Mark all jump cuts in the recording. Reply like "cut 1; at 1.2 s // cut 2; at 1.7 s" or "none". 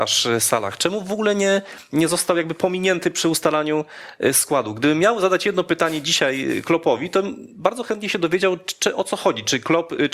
none